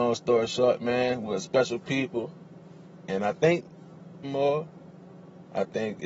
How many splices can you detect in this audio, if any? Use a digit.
1